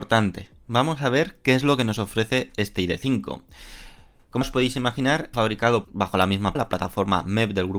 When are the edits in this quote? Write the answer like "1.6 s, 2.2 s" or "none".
4.4 s, 5.3 s, 5.8 s, 6.5 s